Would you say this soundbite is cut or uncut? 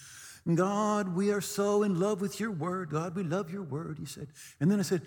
uncut